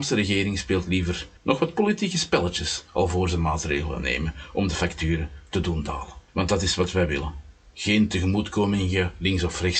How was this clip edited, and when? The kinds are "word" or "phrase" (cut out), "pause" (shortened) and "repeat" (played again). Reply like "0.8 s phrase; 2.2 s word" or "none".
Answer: 1.4 s pause; 6.3 s pause